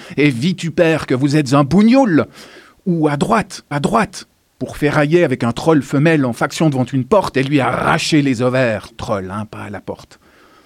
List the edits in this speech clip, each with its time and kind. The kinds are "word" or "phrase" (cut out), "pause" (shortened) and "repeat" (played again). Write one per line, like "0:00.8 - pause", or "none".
0:03.7 - repeat
0:08.9 - word